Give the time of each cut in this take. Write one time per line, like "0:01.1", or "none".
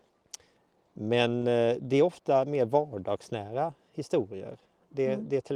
none

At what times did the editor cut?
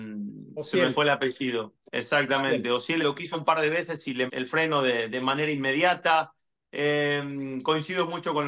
0:03.0
0:03.3
0:04.3
0:05.1

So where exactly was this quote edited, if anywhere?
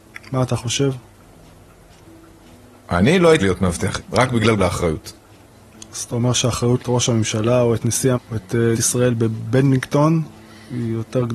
0:03.4
0:04.0
0:04.6
0:06.8
0:08.1
0:08.7

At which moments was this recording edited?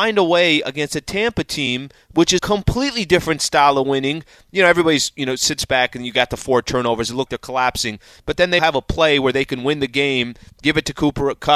0:02.4
0:07.3
0:08.6

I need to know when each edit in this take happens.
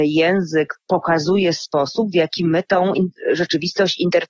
none

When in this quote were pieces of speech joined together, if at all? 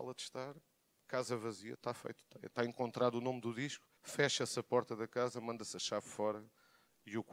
0:01.7
0:04.0

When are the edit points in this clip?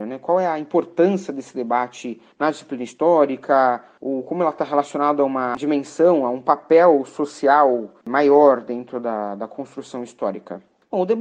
none

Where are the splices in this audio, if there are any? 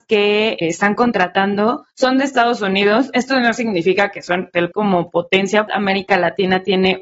0:01.9
0:04.7
0:05.7

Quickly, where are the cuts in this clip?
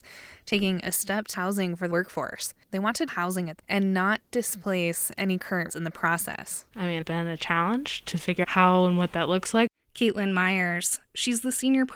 0:01.3
0:01.9
0:03.1
0:03.6
0:05.7
0:07.0
0:08.4

